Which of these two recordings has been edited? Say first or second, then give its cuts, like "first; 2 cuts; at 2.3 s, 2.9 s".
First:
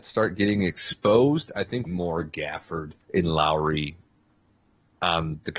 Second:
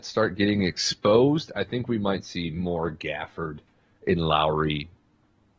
first; 2 cuts; at 1.9 s, 3.0 s